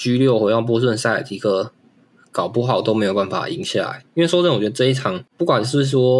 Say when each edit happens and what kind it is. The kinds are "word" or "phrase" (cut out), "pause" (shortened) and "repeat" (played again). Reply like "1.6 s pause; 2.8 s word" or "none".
none